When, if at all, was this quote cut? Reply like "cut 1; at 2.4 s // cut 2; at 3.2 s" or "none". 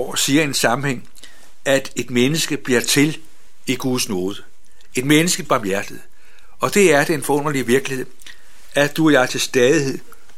cut 1; at 5.4 s